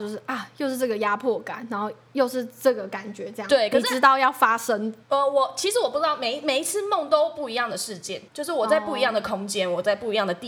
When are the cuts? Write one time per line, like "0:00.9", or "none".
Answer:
0:05.0
0:08.3